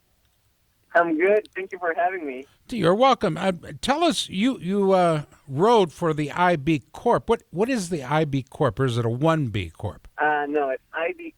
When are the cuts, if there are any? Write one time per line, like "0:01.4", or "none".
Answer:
0:10.1

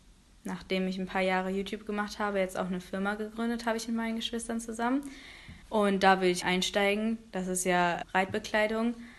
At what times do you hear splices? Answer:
0:05.6
0:06.4
0:08.0

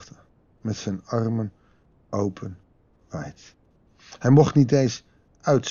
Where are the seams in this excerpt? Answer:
none

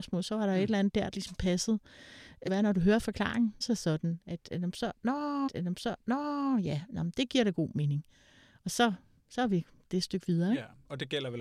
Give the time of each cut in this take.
0:01.1
0:02.5
0:03.6
0:05.5
0:09.9

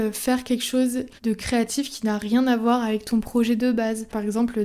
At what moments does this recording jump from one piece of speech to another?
0:01.2

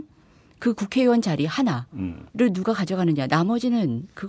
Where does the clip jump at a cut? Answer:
0:02.3

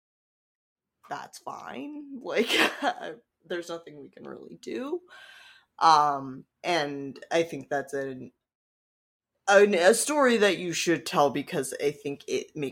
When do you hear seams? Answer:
0:06.5

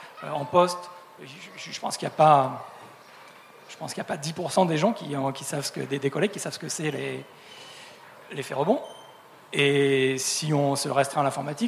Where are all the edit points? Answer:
none

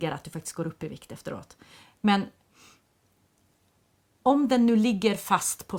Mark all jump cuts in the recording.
none

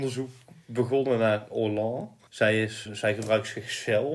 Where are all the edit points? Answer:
0:02.3
0:02.9

